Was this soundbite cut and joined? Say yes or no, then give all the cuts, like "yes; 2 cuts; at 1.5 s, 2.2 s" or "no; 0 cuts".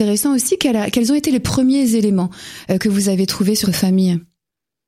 yes; 1 cut; at 3.6 s